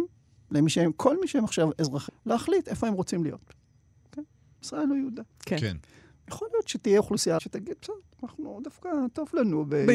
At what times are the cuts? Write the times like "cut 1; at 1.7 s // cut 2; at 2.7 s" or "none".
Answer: cut 1; at 2.1 s // cut 2; at 7.4 s